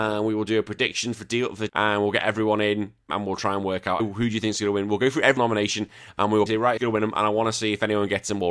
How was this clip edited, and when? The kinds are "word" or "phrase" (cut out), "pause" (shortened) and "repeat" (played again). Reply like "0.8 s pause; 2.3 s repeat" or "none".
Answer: 1.7 s word; 3.1 s word; 4.0 s word; 5.4 s word; 6.5 s word; 6.8 s word